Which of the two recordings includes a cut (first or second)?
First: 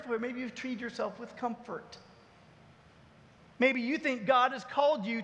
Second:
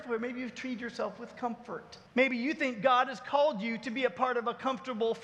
second